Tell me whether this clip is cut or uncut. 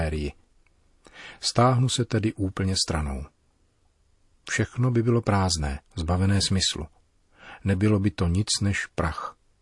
cut